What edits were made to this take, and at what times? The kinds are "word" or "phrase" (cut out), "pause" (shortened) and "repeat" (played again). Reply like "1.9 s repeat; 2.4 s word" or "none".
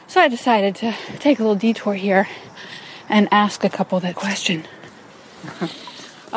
4.1 s word; 5.1 s pause